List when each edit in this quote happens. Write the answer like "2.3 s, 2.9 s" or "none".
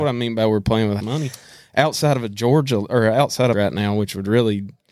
1.0 s, 3.5 s